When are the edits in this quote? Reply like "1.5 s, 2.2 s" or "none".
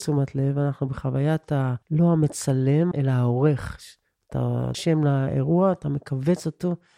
1.8 s, 2.9 s, 4.7 s